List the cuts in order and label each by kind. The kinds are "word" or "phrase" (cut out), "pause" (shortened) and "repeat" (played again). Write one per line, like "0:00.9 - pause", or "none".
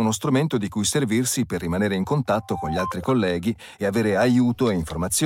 none